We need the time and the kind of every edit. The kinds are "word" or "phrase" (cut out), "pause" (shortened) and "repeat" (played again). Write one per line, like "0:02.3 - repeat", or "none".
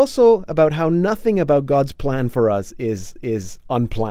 0:03.2 - repeat